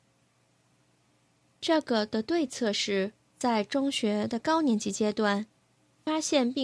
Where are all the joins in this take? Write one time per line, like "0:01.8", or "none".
0:03.2